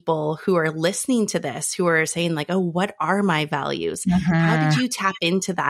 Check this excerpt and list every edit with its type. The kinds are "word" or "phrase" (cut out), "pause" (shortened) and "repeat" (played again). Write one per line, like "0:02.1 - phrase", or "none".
none